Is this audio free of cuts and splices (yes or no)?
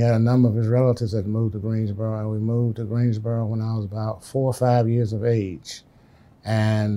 yes